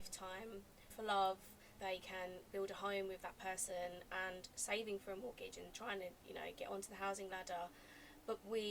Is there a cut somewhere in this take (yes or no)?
yes